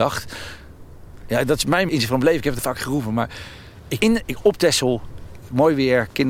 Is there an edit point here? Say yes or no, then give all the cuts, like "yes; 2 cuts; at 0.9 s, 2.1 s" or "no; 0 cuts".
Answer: yes; 3 cuts; at 1.9 s, 2.6 s, 4.0 s